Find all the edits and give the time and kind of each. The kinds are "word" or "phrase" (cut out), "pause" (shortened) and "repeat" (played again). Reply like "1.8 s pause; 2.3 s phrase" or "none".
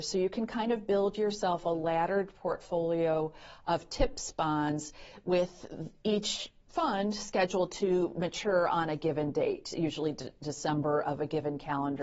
6.6 s pause